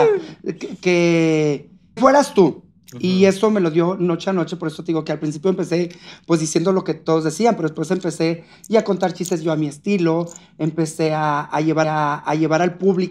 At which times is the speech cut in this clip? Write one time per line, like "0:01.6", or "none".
0:02.0
0:11.8

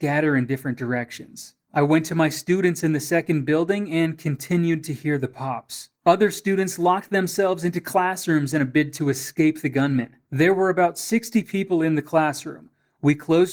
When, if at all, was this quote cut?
0:01.6
0:05.9
0:10.2

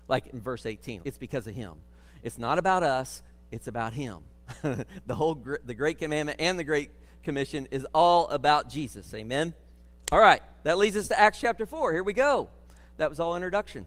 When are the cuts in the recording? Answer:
0:01.0

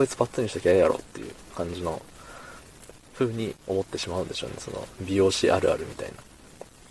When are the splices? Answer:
0:03.6

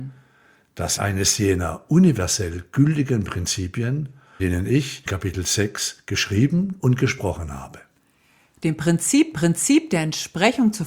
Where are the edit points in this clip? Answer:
0:01.0
0:04.4
0:05.1
0:09.3

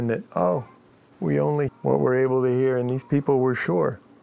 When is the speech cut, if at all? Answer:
0:01.7

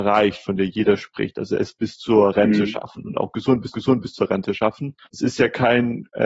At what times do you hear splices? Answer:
0:03.7
0:05.0

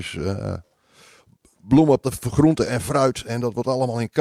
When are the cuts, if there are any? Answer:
0:02.0

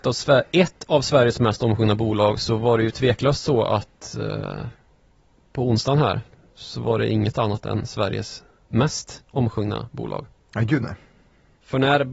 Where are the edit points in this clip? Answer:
none

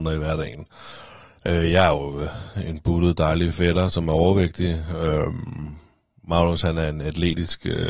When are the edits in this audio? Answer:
none

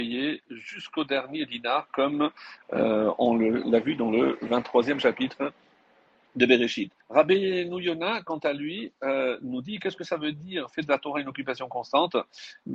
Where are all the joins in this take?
0:07.0

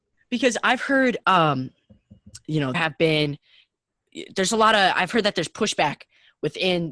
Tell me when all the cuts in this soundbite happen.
0:02.7

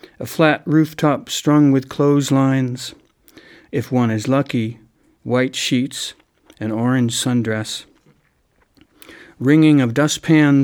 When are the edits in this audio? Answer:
none

